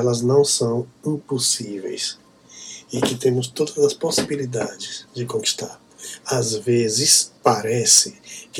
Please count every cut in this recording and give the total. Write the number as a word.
one